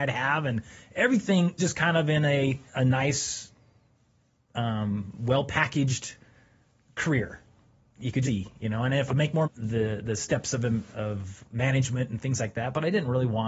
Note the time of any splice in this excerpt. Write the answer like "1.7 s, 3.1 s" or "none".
1.6 s, 2.7 s, 8.2 s, 9.1 s, 9.4 s